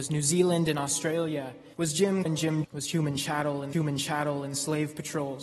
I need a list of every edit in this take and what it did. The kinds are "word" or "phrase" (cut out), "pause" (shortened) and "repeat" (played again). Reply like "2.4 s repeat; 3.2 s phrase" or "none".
1.7 s pause; 2.3 s word; 2.6 s word; 3.7 s repeat